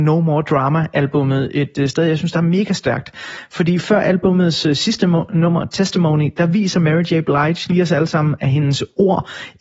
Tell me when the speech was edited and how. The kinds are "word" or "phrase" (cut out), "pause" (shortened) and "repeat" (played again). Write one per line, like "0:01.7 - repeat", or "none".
none